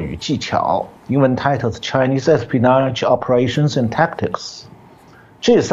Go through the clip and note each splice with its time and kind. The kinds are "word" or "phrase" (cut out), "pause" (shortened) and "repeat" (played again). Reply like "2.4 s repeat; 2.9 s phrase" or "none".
1.0 s pause